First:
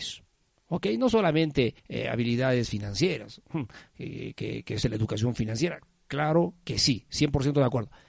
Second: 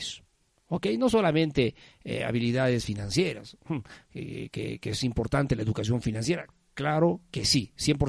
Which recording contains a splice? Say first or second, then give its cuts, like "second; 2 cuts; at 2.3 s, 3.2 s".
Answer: first; 2 cuts; at 1.8 s, 4.8 s